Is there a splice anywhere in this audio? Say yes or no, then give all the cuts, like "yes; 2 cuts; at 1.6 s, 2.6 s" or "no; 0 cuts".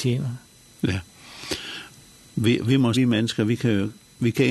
yes; 1 cut; at 2.9 s